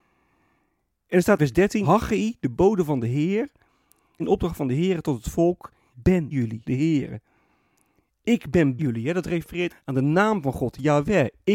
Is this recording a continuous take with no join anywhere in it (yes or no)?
no